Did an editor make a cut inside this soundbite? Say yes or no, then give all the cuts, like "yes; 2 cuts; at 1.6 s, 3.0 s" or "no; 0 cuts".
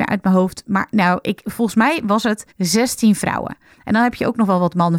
yes; 1 cut; at 2.5 s